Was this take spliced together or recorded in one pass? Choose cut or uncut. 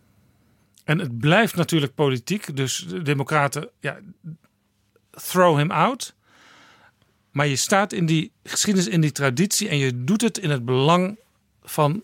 uncut